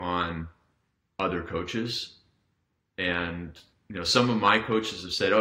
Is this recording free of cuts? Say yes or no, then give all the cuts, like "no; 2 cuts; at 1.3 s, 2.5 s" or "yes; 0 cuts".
yes; 0 cuts